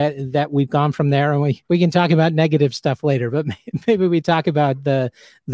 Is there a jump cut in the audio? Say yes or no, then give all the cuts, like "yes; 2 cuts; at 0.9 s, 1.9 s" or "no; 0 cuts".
yes; 1 cut; at 1.6 s